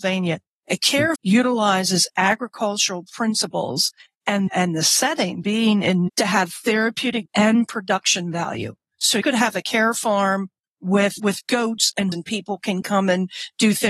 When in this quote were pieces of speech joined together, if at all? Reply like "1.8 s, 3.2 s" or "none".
1.2 s, 4.5 s, 5.4 s, 6.1 s, 7.3 s, 9.2 s, 11.2 s, 12.1 s